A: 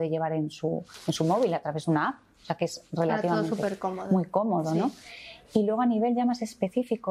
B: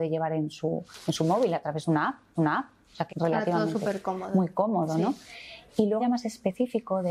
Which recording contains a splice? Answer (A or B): B